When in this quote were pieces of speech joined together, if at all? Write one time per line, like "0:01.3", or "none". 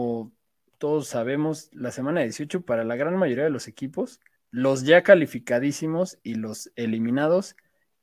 0:04.4